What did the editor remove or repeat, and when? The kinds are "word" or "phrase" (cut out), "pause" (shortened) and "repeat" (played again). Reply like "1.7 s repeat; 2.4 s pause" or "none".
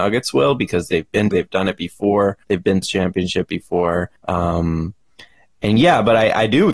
1.3 s word; 2.4 s pause; 2.8 s phrase; 4.2 s pause